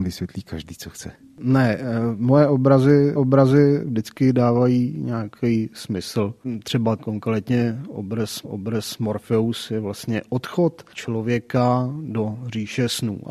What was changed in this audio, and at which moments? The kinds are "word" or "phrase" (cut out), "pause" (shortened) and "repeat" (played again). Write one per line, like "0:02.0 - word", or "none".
0:03.2 - repeat
0:07.0 - word
0:08.4 - repeat
0:10.9 - pause